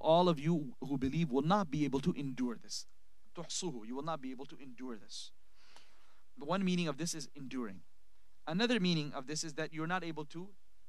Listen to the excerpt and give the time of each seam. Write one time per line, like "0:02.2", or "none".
none